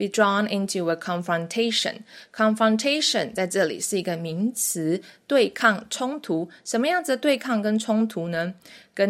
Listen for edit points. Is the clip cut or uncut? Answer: uncut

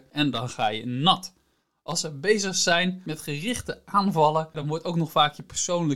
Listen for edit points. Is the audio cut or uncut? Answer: uncut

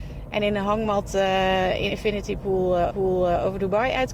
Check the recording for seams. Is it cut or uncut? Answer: cut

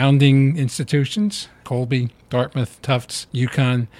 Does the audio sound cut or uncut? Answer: cut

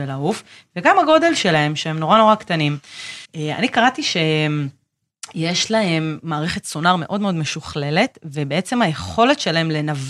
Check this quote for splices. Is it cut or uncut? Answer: cut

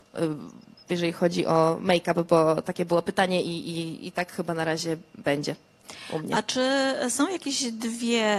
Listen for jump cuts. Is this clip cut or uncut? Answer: uncut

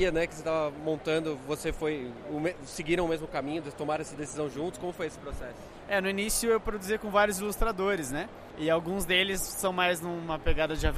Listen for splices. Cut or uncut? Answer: uncut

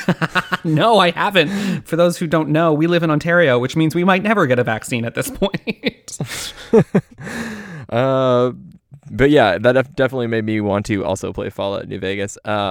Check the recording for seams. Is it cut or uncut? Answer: uncut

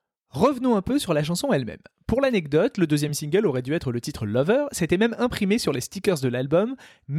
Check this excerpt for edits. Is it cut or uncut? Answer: uncut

